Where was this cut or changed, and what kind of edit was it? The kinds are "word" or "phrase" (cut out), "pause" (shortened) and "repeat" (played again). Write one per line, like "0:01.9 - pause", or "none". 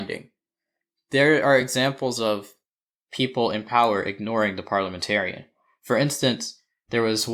none